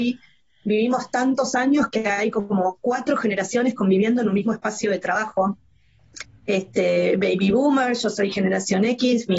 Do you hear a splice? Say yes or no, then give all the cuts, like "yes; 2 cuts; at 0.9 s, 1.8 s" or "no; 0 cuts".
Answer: no; 0 cuts